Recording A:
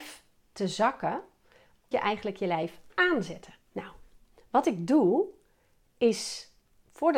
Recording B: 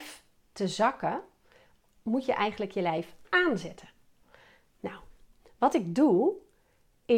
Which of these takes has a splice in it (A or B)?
A